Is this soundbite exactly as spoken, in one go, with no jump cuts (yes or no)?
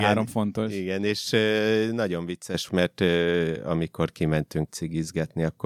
no